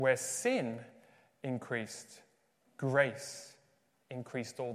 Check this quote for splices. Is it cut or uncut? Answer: uncut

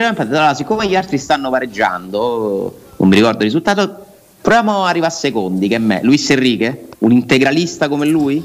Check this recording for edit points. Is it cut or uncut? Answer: cut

